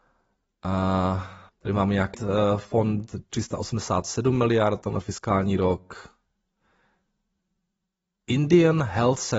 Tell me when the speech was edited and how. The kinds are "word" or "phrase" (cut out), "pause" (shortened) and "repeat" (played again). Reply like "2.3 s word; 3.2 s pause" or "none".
1.5 s pause; 2.1 s phrase; 4.8 s word